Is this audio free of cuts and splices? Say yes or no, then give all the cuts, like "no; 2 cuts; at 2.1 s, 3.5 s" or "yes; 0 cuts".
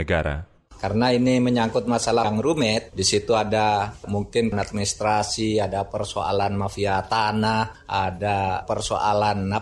no; 2 cuts; at 2.2 s, 4.5 s